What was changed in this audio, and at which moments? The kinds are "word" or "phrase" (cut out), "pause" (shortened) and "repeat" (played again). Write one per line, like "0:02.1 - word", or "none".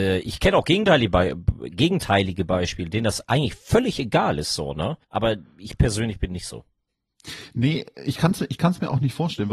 0:05.0 - pause